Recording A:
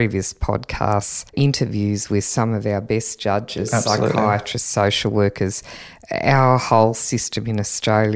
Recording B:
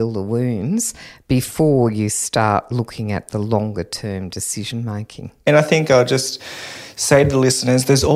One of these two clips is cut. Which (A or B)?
A